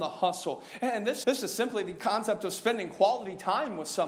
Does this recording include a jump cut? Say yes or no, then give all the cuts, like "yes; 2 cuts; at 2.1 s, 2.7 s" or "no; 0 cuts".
yes; 1 cut; at 1.2 s